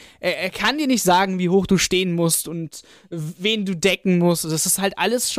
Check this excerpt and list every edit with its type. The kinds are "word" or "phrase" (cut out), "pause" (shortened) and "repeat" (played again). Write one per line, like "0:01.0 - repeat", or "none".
none